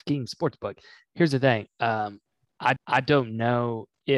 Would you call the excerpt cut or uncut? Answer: cut